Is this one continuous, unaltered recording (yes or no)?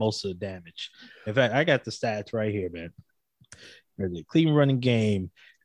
yes